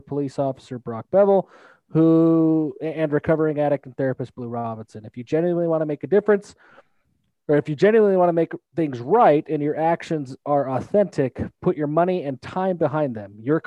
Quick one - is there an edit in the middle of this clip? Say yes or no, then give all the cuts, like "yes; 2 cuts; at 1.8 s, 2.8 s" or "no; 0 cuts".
no; 0 cuts